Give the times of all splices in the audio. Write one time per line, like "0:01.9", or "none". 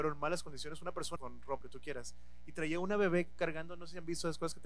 0:01.2
0:01.6